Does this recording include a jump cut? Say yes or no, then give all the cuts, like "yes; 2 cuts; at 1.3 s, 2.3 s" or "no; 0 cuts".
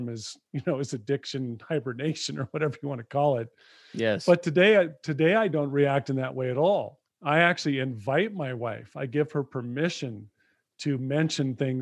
yes; 1 cut; at 7.1 s